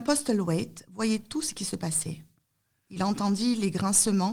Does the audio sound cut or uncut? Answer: uncut